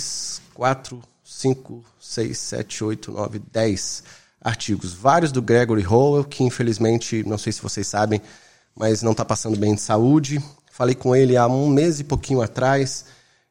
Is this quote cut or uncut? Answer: uncut